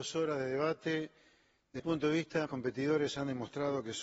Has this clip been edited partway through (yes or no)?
yes